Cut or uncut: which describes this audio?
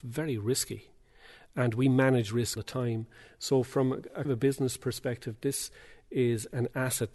cut